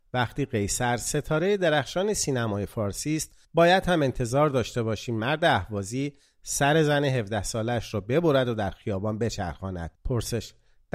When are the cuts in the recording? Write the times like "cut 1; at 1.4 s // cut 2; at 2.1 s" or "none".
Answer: cut 1; at 3.4 s // cut 2; at 10.0 s